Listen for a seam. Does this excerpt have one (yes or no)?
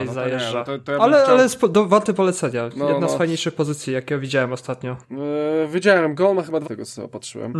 yes